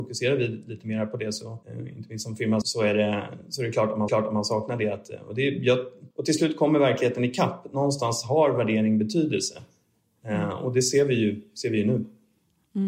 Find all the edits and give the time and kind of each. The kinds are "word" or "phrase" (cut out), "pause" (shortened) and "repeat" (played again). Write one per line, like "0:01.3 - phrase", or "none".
0:01.6 - pause
0:02.6 - word
0:04.1 - repeat
0:06.1 - pause